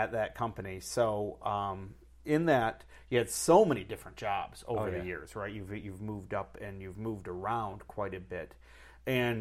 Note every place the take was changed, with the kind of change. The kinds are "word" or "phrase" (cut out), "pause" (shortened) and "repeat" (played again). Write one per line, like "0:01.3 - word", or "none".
none